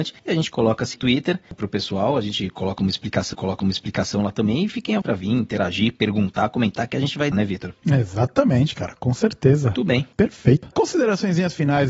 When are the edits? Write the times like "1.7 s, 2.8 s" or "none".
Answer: 0.9 s, 3.3 s, 5.0 s, 7.3 s, 10.1 s